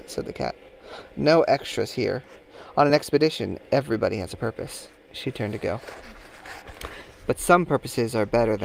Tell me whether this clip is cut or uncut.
uncut